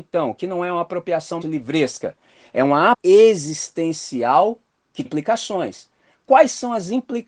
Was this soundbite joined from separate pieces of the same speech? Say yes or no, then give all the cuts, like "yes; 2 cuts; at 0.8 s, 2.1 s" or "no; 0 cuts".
yes; 3 cuts; at 1.4 s, 2.9 s, 5.0 s